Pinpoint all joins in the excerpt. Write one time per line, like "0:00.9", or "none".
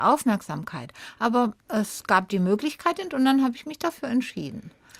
0:01.6
0:03.1